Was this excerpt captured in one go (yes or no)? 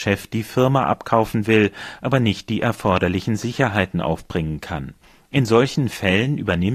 yes